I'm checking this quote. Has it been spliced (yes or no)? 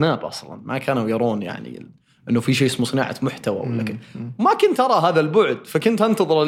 no